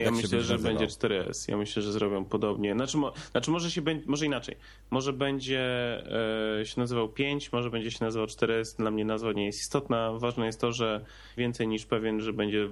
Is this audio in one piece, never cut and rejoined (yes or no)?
no